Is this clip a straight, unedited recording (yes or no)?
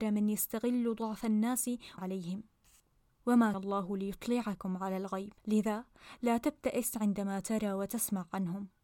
no